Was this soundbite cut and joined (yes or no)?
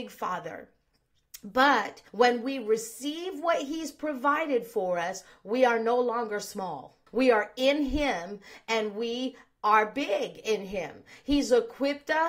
yes